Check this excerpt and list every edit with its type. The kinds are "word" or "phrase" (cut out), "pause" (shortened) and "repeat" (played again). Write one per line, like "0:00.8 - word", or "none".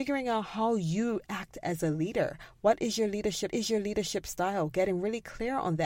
0:03.5 - repeat